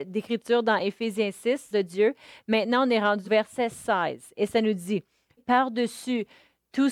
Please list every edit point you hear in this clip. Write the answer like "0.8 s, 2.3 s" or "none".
1.7 s, 3.2 s, 5.4 s